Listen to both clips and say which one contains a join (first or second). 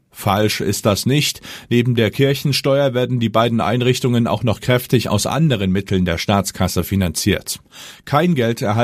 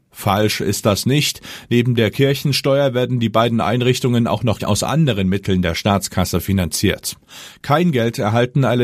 second